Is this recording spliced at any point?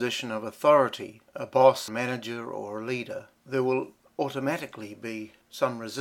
yes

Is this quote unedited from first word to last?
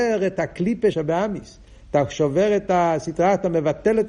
no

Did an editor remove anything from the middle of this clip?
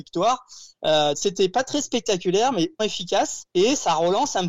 yes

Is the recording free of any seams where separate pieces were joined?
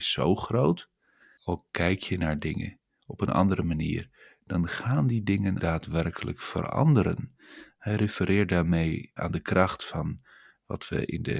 no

